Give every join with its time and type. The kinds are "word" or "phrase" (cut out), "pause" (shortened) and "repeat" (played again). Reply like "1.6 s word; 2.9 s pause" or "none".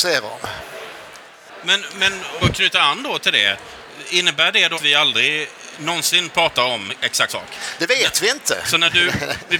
2.4 s word; 4.7 s word; 7.3 s word